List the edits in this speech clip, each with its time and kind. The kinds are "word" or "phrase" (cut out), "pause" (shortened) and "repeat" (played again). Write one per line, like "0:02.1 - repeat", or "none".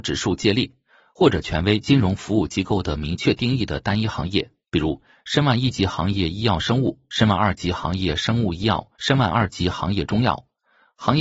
0:09.0 - pause